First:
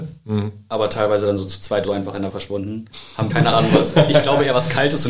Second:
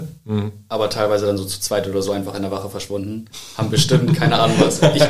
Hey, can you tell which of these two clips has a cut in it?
first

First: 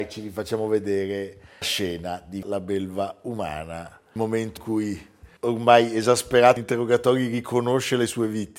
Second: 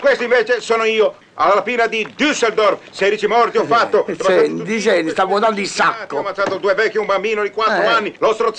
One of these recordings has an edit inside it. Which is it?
first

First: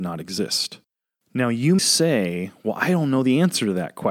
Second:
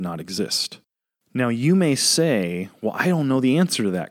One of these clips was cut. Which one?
first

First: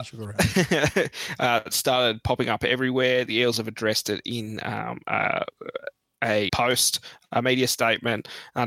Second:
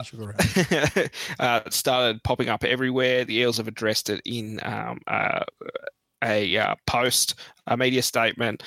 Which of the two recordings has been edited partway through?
first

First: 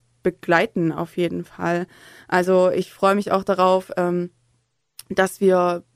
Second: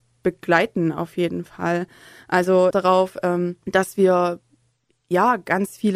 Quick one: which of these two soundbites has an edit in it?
second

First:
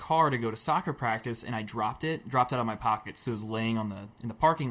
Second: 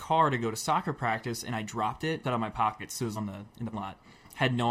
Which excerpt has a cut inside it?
second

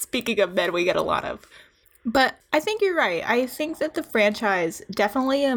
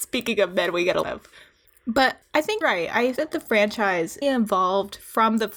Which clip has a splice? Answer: second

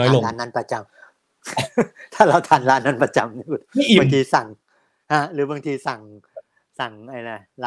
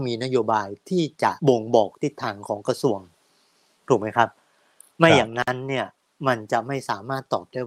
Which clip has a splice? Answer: second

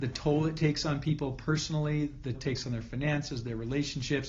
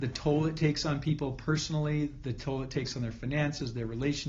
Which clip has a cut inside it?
first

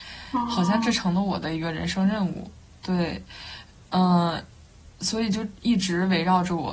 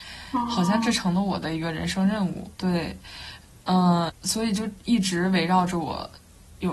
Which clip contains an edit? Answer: second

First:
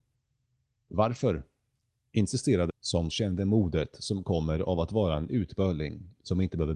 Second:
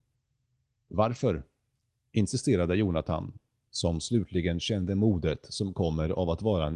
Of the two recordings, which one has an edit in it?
first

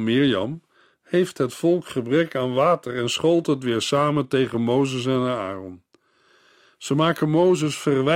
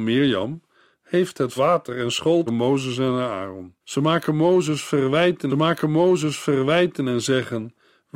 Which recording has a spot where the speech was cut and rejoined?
second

